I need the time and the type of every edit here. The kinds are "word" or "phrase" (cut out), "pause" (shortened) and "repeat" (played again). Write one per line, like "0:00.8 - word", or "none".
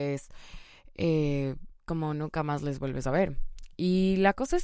0:01.8 - pause